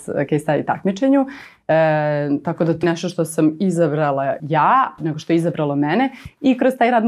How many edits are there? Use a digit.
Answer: 3